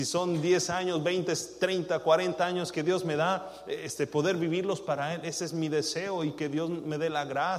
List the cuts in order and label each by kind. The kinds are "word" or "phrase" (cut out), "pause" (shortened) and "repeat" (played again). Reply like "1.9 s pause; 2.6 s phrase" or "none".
none